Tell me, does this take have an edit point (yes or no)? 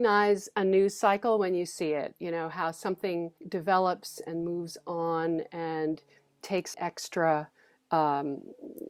yes